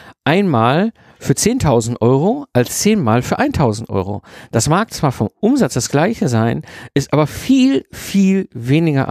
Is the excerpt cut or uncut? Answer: uncut